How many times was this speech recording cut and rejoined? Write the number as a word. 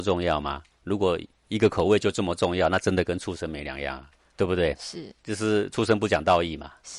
two